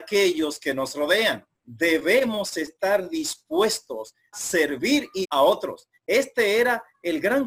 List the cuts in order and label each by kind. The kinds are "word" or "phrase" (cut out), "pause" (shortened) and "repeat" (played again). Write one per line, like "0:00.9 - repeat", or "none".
0:01.5 - pause
0:04.3 - word
0:05.2 - word